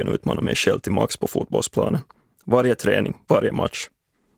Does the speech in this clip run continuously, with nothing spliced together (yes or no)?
yes